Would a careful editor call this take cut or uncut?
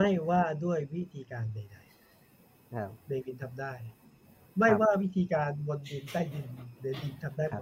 uncut